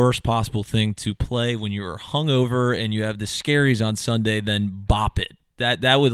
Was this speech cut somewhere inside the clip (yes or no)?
no